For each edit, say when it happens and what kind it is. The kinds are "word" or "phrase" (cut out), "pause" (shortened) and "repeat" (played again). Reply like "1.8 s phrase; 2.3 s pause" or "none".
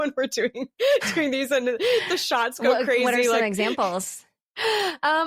none